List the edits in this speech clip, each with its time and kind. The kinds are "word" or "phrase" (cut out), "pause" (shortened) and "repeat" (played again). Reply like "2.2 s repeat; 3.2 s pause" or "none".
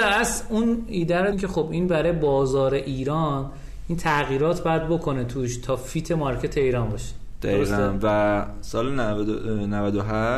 1.3 s phrase